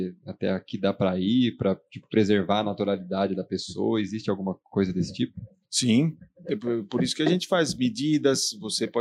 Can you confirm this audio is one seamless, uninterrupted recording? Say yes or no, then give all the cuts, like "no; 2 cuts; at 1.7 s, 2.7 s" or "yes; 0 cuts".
no; 1 cut; at 5.6 s